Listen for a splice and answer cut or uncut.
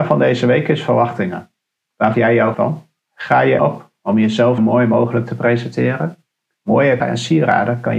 cut